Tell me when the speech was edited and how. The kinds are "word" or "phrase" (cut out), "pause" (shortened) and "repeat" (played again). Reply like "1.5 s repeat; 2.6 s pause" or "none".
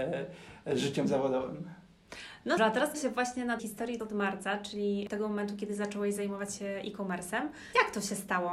2.6 s word; 2.9 s word; 3.6 s word